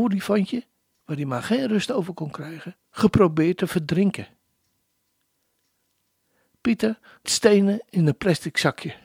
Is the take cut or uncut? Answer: cut